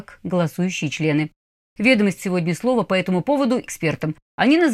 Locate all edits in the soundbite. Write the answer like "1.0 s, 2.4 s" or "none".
2.2 s, 3.7 s